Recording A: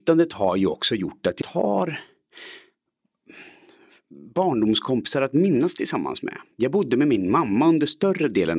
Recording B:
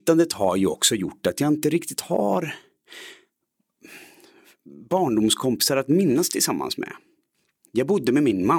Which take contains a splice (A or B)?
A